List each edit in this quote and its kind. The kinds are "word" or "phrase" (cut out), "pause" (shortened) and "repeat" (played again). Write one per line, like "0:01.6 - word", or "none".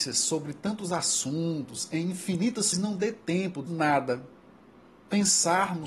0:02.7 - phrase
0:03.7 - word